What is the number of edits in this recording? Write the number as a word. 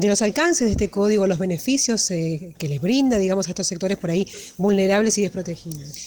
one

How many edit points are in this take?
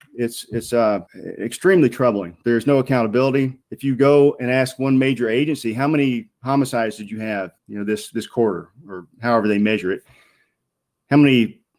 three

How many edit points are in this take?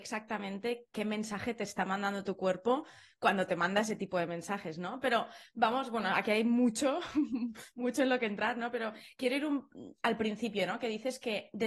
zero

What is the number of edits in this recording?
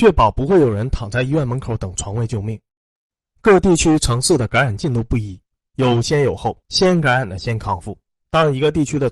one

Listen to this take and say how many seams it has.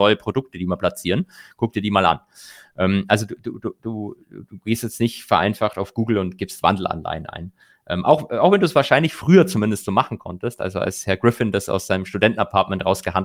zero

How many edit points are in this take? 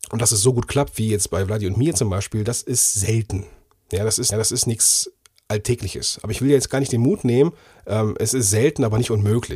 one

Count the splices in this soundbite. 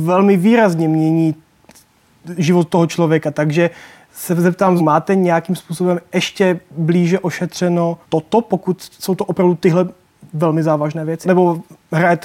three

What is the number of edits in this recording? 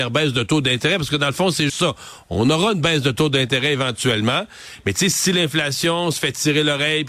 one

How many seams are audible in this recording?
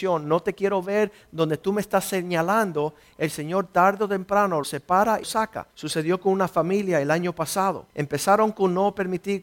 four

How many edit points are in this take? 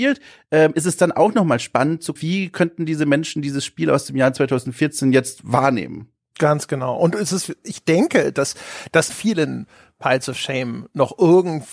two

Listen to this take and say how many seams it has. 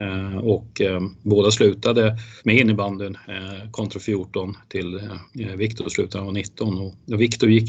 two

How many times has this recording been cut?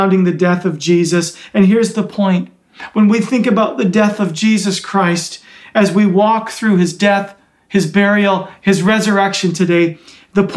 zero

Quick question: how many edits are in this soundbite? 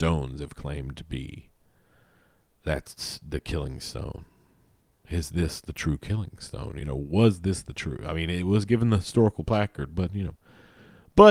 zero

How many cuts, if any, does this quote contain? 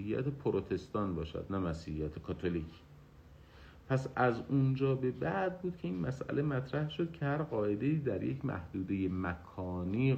zero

